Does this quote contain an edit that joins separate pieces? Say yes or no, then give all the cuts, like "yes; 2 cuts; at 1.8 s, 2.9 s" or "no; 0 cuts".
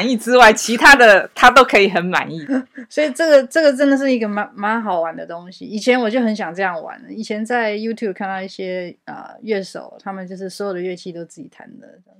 no; 0 cuts